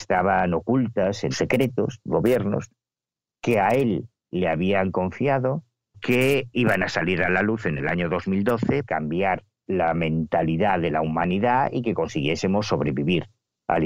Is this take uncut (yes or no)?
no